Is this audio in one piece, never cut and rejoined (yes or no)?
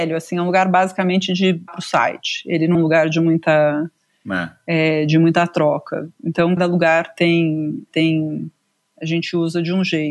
no